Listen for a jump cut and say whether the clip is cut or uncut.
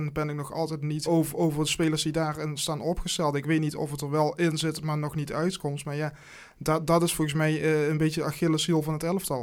cut